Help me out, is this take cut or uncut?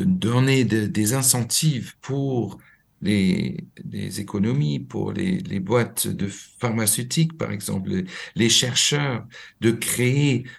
cut